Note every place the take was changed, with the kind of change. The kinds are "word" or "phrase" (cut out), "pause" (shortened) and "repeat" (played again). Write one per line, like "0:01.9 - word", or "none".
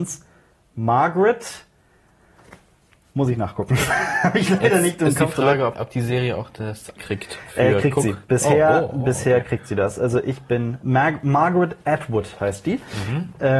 0:05.7 - word
0:07.0 - word